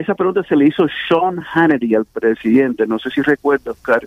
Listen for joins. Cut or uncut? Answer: uncut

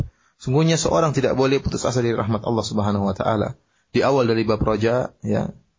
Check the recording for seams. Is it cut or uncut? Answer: uncut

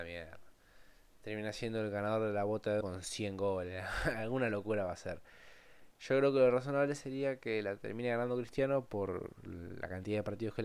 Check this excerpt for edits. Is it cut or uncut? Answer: cut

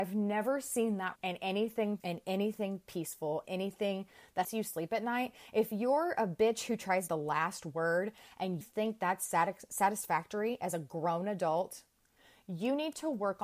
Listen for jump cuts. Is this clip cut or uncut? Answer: cut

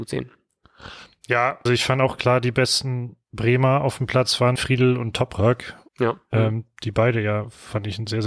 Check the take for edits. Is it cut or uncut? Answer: cut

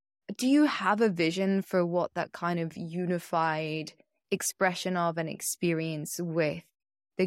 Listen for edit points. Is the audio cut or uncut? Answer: uncut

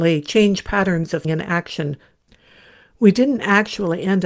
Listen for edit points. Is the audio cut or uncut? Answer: cut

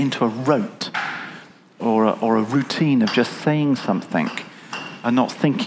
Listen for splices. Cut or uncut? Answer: uncut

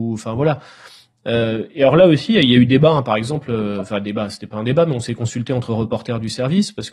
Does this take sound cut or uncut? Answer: uncut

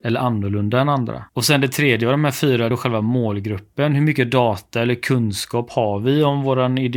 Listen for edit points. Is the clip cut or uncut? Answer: cut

